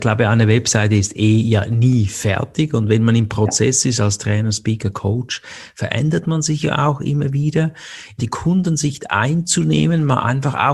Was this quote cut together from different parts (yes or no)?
yes